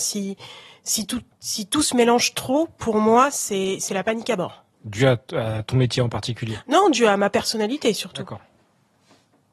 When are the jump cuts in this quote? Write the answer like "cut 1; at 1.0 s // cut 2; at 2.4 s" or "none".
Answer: cut 1; at 1.3 s // cut 2; at 4.7 s